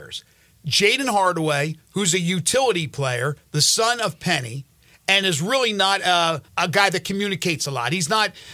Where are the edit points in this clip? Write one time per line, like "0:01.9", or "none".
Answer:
0:06.5